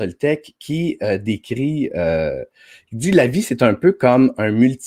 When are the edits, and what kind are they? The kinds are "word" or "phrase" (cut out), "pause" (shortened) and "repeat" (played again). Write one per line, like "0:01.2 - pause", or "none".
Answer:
none